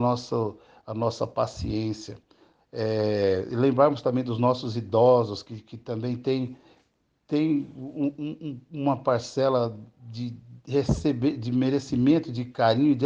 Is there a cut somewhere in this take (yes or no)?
no